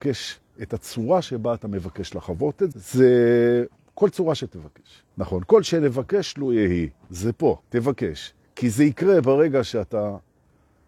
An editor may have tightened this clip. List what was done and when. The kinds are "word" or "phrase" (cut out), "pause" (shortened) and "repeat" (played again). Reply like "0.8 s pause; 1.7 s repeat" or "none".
2.7 s word; 5.1 s pause; 7.6 s pause